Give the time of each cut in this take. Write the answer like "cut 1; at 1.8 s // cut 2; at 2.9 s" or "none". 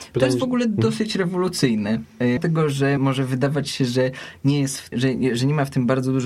cut 1; at 2.4 s // cut 2; at 3.0 s // cut 3; at 4.9 s